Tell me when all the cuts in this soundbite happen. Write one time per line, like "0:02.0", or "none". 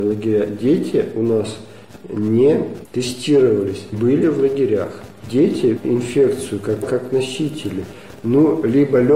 0:03.9
0:05.8
0:06.8